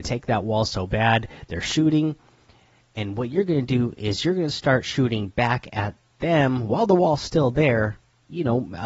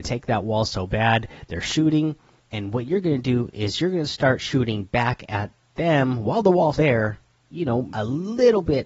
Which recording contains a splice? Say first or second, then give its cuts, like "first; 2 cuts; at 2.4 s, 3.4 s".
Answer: second; 3 cuts; at 2.4 s, 6.7 s, 7.9 s